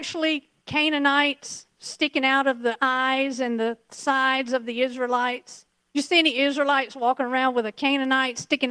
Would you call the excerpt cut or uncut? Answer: uncut